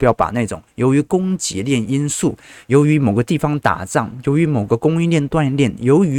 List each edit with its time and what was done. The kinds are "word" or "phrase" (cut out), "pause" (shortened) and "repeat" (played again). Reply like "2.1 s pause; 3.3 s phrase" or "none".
none